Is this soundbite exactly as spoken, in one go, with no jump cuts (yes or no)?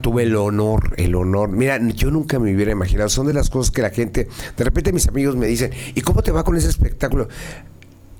yes